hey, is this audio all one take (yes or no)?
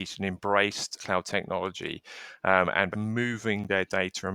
no